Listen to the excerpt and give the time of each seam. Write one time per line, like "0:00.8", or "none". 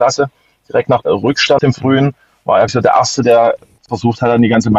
0:01.0
0:01.6
0:02.7